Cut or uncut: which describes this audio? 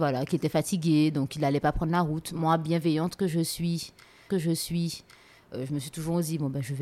cut